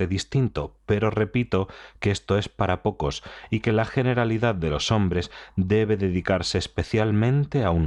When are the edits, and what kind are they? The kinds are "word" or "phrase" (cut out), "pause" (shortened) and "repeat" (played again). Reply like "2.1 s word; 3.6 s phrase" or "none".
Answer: none